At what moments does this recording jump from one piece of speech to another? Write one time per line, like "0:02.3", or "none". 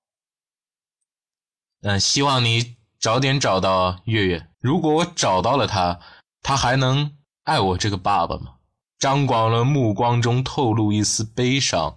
0:04.5